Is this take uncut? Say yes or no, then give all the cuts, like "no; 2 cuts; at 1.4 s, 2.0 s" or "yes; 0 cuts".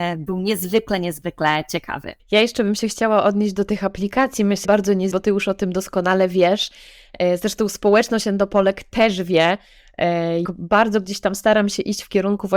no; 4 cuts; at 2.2 s, 4.6 s, 5.1 s, 10.4 s